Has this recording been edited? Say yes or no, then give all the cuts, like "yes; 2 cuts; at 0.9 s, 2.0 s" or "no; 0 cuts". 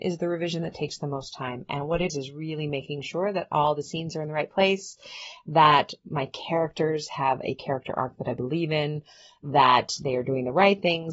yes; 1 cut; at 2.1 s